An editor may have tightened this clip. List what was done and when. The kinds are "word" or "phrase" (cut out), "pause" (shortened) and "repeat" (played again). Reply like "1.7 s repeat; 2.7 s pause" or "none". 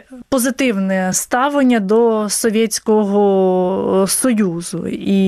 none